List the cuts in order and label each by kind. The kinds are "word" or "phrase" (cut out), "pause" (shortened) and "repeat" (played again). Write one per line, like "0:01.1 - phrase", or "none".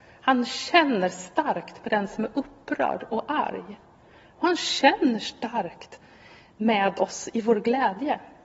none